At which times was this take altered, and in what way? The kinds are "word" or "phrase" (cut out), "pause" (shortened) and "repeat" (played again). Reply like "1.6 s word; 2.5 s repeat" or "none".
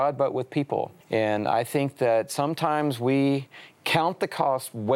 1.0 s pause